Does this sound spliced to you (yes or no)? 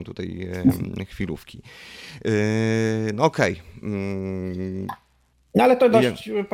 no